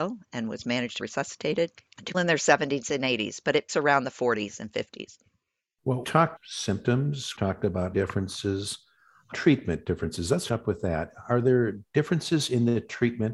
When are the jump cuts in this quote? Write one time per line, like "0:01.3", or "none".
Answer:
0:01.0
0:02.1
0:03.7
0:06.0
0:06.4
0:07.4
0:07.9
0:09.3
0:10.5